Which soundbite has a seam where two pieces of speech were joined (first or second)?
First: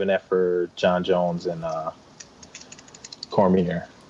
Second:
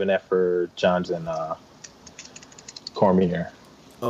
second